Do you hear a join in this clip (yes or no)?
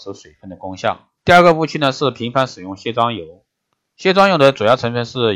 yes